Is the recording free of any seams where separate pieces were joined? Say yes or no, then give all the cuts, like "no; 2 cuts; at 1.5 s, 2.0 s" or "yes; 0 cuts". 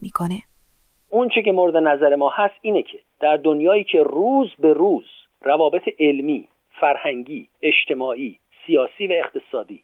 no; 1 cut; at 7.5 s